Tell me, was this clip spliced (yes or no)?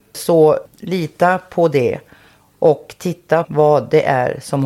yes